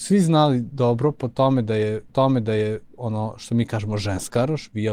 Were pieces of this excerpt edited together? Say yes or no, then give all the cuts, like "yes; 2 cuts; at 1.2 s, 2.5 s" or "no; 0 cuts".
yes; 1 cut; at 2.1 s